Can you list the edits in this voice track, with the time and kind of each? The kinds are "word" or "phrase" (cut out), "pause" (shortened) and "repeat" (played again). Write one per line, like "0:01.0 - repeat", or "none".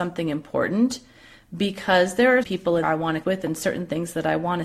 0:02.4 - word
0:02.8 - word
0:03.2 - word